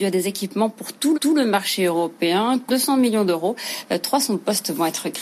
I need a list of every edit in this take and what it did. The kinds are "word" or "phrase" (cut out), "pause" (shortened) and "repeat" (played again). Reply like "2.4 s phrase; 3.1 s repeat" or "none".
1.1 s repeat; 2.7 s word